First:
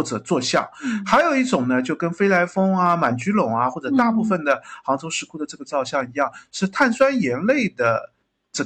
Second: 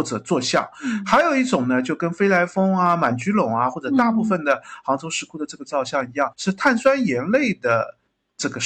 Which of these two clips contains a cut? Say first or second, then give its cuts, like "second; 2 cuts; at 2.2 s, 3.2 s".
second; 1 cut; at 6.3 s